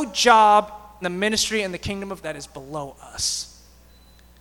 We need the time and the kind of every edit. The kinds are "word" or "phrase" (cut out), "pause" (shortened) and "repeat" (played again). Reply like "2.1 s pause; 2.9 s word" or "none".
1.0 s word; 2.2 s word